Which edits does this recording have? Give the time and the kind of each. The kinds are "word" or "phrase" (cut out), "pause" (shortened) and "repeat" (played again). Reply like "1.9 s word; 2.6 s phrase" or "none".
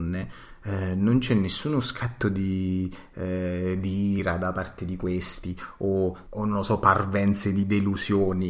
none

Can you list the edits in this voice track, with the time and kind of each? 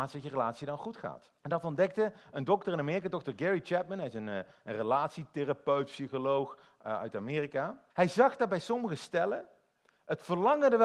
1.4 s pause; 7.9 s pause

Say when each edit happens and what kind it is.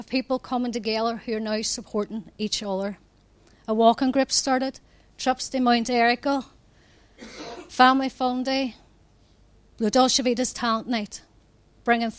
none

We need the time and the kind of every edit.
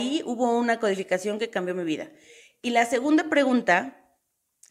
none

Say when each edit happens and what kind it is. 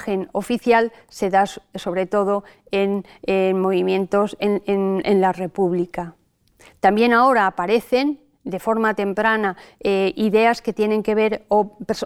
none

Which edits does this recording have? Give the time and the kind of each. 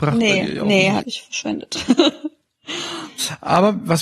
1.0 s phrase

